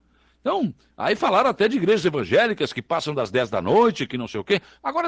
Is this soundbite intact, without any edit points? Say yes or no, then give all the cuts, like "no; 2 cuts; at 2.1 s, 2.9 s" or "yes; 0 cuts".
yes; 0 cuts